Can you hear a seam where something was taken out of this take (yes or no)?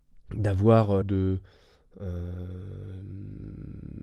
yes